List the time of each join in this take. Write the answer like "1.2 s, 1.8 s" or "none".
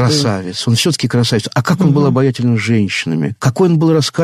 none